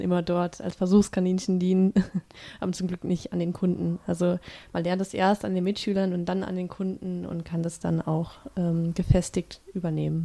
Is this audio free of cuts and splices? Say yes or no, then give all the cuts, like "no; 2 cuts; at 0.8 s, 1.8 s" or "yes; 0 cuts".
yes; 0 cuts